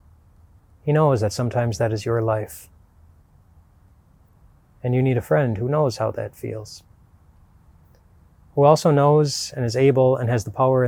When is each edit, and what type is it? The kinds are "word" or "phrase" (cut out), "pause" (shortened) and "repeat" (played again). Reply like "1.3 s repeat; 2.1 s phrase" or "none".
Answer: none